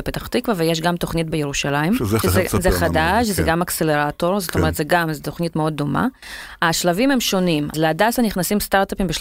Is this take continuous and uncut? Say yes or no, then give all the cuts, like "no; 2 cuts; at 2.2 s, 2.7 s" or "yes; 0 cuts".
no; 3 cuts; at 1.3 s, 2.2 s, 7.7 s